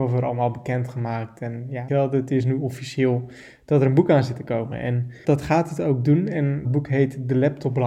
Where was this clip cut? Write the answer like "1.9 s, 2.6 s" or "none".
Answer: 1.9 s, 5.2 s, 6.6 s